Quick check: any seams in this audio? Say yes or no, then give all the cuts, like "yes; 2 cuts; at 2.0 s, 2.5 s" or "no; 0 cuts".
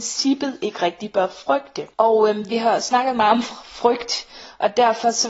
yes; 1 cut; at 1.9 s